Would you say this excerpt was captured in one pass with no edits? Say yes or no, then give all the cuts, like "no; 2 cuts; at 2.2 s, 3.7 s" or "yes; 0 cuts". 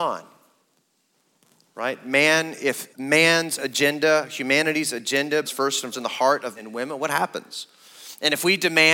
no; 4 cuts; at 2.9 s, 5.4 s, 5.9 s, 6.6 s